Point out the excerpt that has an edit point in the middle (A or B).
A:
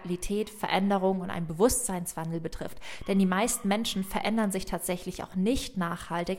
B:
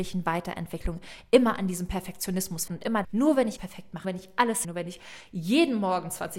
B